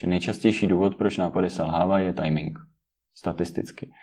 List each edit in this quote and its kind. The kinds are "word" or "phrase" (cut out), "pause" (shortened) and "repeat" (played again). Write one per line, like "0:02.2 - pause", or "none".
none